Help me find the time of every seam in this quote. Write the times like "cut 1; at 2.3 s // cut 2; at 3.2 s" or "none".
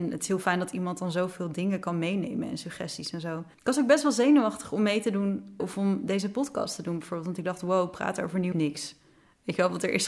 cut 1; at 3.5 s // cut 2; at 5.6 s // cut 3; at 8.5 s